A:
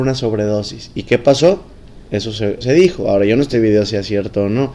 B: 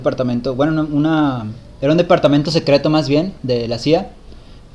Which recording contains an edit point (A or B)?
A